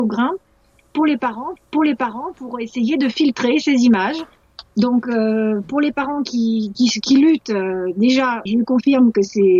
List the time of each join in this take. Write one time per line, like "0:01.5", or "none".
0:01.6
0:06.7
0:08.5